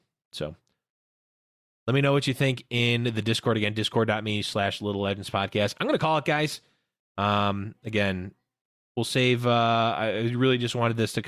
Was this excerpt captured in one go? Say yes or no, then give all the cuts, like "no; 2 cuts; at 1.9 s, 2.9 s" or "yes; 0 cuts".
yes; 0 cuts